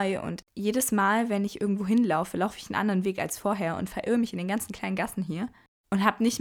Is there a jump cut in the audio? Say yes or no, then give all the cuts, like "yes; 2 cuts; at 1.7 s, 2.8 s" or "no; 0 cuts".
no; 0 cuts